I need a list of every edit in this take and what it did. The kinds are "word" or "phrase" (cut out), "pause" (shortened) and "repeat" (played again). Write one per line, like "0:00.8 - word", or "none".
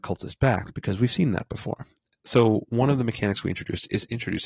none